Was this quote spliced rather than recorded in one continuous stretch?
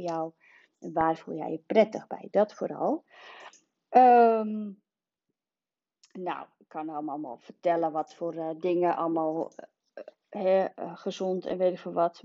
no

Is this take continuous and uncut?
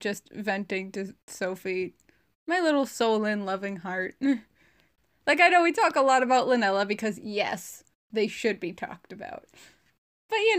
yes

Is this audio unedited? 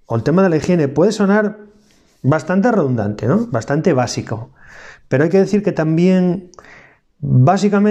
yes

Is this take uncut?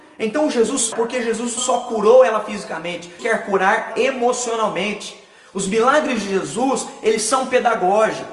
no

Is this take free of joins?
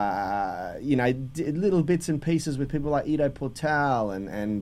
yes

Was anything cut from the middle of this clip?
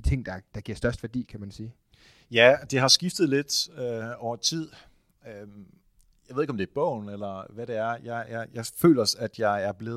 no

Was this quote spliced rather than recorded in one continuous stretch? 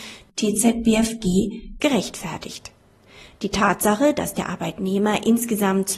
no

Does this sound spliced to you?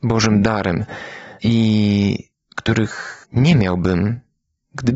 yes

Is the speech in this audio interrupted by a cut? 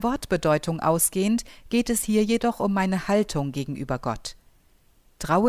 no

